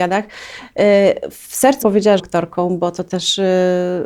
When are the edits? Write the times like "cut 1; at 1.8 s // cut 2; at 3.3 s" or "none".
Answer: cut 1; at 1.8 s // cut 2; at 2.2 s